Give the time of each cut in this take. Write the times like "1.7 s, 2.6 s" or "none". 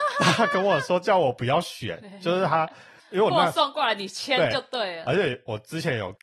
3.0 s